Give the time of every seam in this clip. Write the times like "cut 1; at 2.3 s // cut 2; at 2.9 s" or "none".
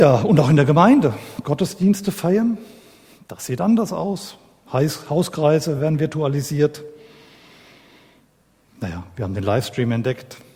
none